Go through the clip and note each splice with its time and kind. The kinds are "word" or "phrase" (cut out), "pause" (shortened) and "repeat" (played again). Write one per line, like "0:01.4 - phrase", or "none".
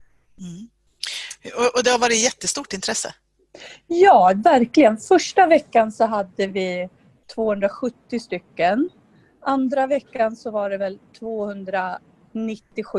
none